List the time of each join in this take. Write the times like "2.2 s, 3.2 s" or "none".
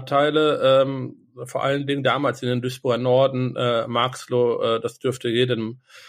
none